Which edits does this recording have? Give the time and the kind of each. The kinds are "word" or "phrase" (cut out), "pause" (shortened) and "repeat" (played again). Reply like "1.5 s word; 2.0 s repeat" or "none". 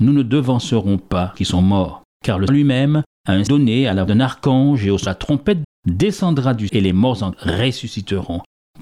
1.3 s word; 2.5 s word; 3.5 s word; 4.1 s word; 5.1 s word; 5.6 s word; 6.7 s word; 7.3 s word